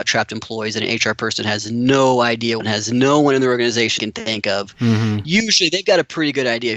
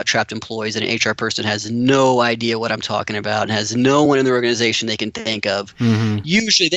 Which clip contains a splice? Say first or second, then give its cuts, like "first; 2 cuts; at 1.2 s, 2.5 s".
first; 2 cuts; at 2.6 s, 4.0 s